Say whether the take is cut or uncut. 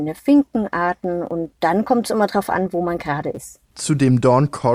cut